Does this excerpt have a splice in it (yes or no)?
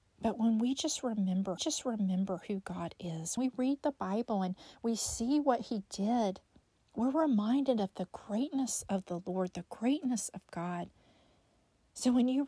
yes